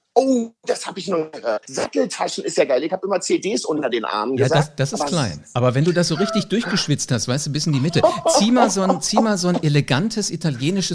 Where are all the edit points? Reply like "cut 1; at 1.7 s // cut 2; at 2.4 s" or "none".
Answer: cut 1; at 1.6 s